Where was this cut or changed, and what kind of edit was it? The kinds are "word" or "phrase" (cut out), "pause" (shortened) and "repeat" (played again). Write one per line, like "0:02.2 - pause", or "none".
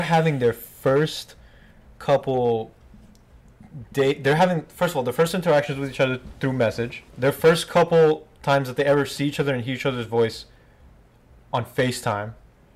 0:07.1 - pause